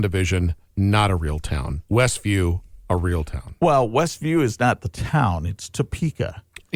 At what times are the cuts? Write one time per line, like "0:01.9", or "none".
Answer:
0:01.9